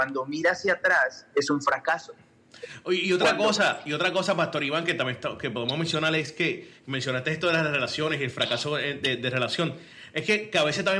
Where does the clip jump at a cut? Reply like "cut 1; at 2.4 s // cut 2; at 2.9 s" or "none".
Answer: none